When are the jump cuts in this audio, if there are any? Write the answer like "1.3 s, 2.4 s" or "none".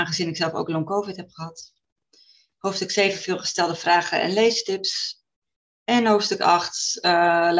none